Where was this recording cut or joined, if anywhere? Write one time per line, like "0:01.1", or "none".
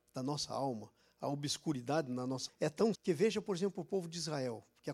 0:02.5
0:02.9